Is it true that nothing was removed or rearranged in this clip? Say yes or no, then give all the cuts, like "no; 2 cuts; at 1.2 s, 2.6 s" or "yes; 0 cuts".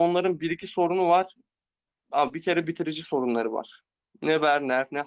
yes; 0 cuts